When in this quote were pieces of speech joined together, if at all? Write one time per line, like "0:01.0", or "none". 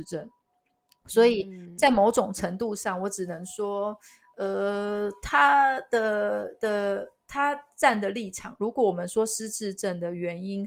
none